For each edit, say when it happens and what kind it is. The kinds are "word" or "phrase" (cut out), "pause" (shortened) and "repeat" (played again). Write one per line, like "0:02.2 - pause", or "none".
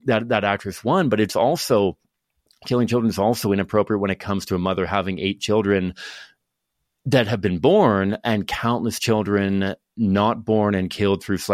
none